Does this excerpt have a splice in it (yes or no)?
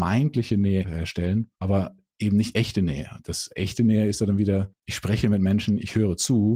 yes